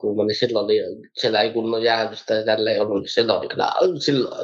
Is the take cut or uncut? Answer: uncut